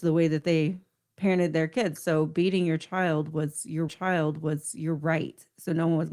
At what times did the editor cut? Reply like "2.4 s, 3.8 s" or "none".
3.9 s